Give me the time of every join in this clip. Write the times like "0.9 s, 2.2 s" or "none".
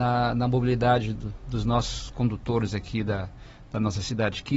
1.2 s